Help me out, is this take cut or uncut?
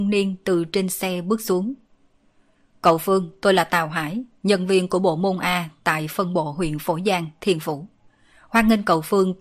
uncut